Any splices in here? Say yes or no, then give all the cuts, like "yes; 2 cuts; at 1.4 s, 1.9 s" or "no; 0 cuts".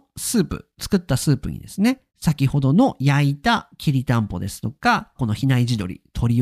yes; 2 cuts; at 2.1 s, 5.2 s